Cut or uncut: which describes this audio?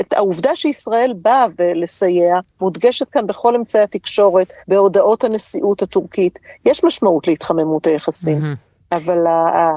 cut